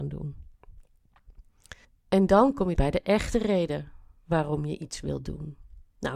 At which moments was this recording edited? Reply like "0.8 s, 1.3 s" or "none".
1.8 s, 2.8 s